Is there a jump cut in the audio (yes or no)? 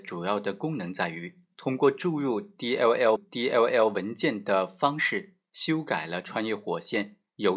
yes